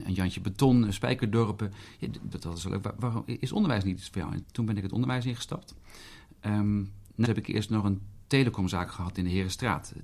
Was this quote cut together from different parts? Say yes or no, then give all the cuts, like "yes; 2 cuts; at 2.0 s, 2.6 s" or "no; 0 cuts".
yes; 4 cuts; at 2.3 s, 4.4 s, 7.2 s, 8.2 s